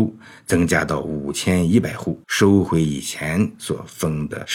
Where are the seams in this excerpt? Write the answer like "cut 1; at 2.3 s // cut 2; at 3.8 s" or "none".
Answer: cut 1; at 2.2 s